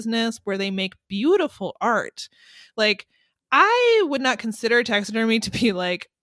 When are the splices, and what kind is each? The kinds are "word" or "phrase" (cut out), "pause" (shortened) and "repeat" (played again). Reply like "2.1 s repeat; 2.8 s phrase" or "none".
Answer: none